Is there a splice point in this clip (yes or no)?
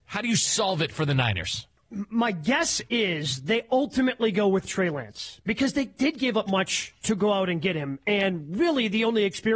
yes